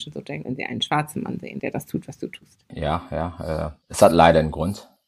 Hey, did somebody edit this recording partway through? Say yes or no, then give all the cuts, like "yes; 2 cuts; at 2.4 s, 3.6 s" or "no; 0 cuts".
no; 0 cuts